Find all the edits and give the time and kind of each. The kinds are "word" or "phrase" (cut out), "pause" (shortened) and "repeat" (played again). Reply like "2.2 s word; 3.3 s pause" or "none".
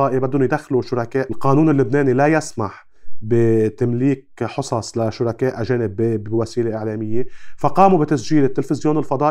1.3 s word